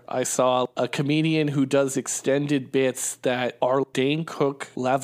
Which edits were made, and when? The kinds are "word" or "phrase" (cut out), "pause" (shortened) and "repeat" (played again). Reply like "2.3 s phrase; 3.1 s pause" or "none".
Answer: 1.9 s word